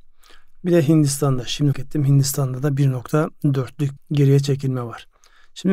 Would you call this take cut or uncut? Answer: cut